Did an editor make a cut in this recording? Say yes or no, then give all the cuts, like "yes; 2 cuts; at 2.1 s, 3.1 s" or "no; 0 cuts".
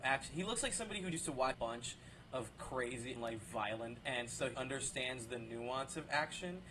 yes; 5 cuts; at 1.1 s, 1.5 s, 3.2 s, 4.0 s, 4.5 s